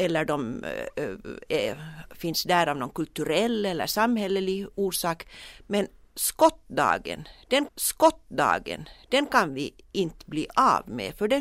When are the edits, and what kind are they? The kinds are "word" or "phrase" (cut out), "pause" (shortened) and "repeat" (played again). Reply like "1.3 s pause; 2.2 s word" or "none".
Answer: 7.7 s repeat